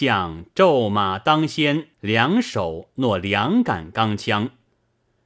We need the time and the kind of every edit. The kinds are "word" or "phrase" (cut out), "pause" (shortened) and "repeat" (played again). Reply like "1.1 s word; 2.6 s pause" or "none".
1.9 s pause